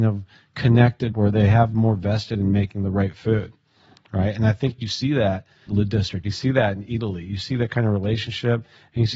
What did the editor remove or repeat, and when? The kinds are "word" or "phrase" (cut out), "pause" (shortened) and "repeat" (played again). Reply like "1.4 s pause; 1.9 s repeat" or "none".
1.1 s word; 5.7 s word